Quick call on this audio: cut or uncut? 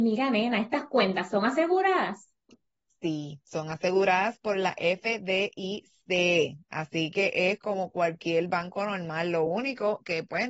uncut